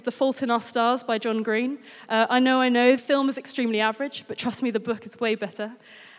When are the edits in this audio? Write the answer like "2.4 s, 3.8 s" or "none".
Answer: 3.0 s